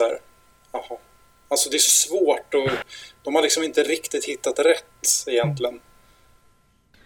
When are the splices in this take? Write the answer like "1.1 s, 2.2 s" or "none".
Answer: none